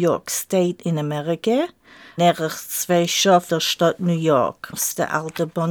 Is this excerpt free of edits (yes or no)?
no